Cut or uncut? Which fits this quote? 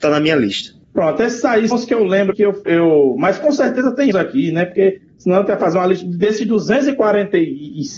cut